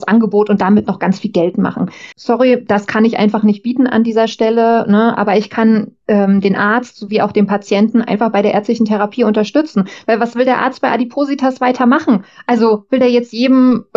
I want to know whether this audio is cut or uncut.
cut